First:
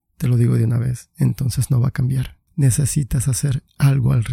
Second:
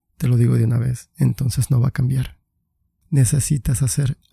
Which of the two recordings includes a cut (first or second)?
first